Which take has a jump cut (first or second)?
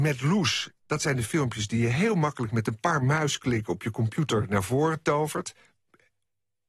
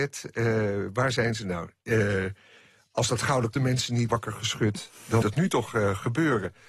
second